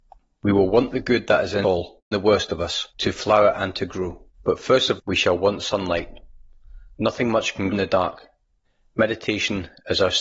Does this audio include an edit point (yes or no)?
yes